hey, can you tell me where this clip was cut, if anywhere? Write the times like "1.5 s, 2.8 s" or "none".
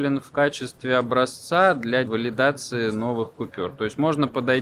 2.0 s